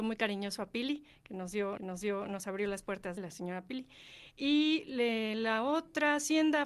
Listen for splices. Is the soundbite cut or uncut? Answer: cut